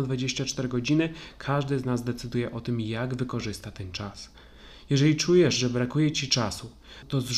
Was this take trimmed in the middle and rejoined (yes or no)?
no